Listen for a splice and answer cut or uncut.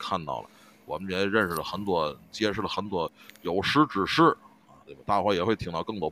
uncut